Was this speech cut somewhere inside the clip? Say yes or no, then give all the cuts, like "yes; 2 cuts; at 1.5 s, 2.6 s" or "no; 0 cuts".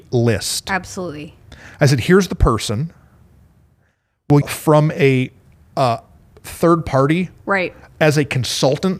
yes; 1 cut; at 4.4 s